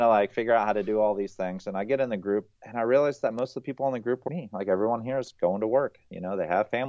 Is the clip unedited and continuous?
no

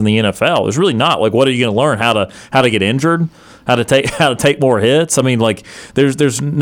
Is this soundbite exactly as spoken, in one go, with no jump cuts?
yes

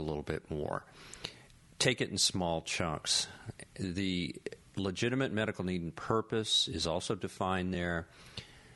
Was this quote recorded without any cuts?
yes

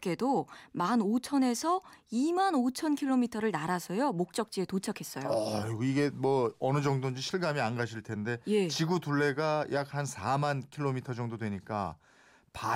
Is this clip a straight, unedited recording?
yes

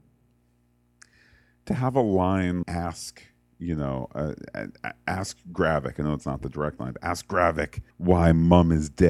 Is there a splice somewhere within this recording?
yes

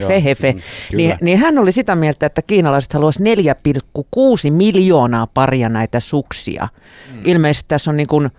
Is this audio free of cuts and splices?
yes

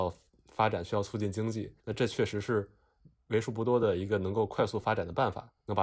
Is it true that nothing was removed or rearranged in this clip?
no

